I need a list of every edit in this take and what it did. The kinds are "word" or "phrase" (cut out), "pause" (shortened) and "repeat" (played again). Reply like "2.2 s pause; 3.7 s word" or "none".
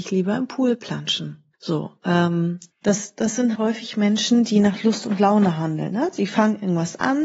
1.5 s pause; 2.7 s pause; 3.6 s word